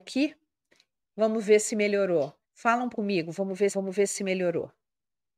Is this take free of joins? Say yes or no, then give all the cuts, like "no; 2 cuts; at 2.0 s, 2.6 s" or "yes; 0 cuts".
no; 3 cuts; at 2.4 s, 2.9 s, 3.7 s